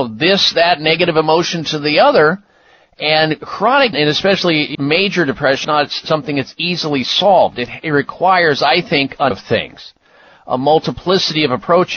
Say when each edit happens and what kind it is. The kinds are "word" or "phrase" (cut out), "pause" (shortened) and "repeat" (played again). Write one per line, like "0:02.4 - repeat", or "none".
0:03.9 - word
0:04.7 - word
0:05.6 - word
0:09.3 - word

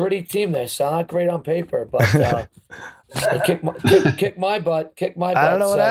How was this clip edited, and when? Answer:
none

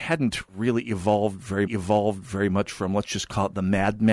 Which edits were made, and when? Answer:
0:01.7 - repeat

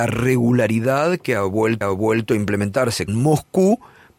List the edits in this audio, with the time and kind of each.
0:01.8 - repeat
0:03.1 - word

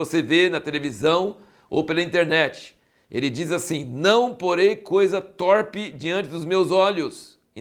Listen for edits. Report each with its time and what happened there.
none

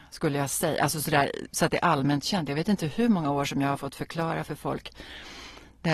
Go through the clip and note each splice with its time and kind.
none

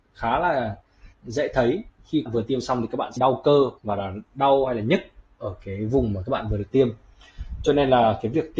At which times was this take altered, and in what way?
0:01.1 - pause
0:02.3 - phrase
0:03.2 - word
0:03.8 - pause

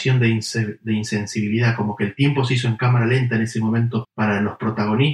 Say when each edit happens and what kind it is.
0:04.0 - word

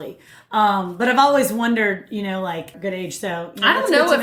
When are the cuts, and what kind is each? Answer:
0:02.7 - phrase

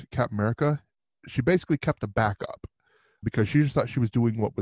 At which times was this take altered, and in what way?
0:03.2 - word

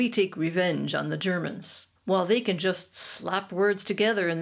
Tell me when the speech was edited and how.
0:02.0 - pause

